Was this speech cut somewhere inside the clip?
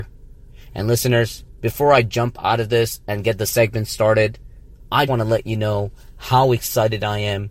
yes; 1 cut; at 5.1 s

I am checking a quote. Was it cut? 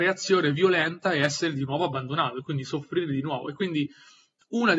no; 0 cuts

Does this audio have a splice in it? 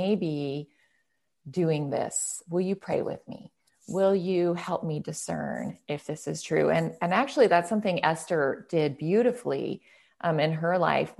no; 0 cuts

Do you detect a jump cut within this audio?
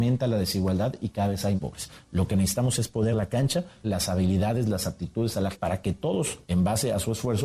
yes; 4 cuts; at 1.6 s, 3.1 s, 3.8 s, 5.5 s

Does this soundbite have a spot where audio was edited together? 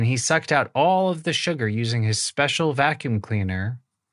no; 0 cuts

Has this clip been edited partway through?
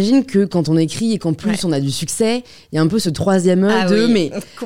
no; 0 cuts

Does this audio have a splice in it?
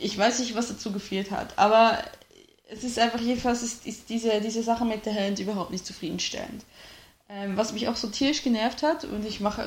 no; 0 cuts

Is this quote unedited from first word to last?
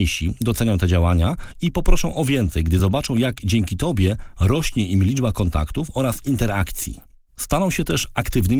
yes; 0 cuts

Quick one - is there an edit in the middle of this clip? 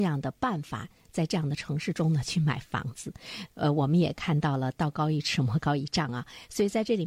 no; 0 cuts

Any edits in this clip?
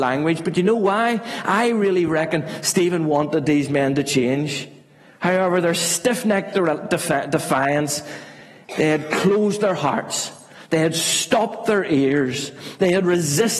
no; 0 cuts

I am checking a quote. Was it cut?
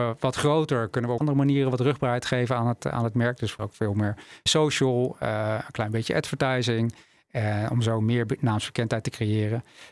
yes; 3 cuts; at 1.2 s, 3.6 s, 4.5 s

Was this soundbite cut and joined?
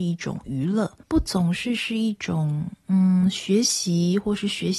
yes; 1 cut; at 1.0 s

